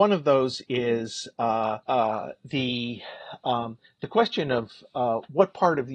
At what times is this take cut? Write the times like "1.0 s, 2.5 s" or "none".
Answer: 1.8 s